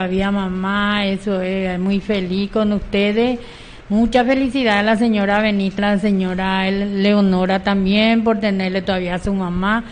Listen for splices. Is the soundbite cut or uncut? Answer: cut